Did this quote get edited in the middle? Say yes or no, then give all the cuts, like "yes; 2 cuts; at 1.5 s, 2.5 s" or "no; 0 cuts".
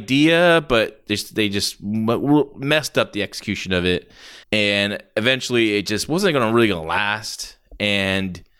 yes; 1 cut; at 4.4 s